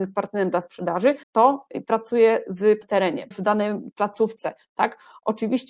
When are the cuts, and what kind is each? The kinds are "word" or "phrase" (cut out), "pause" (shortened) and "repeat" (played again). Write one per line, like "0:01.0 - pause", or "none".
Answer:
0:01.2 - pause
0:02.8 - word
0:03.3 - word